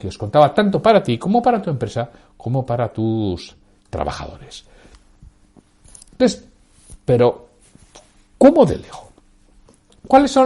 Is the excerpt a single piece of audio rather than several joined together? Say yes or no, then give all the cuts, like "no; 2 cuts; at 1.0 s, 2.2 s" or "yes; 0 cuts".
yes; 0 cuts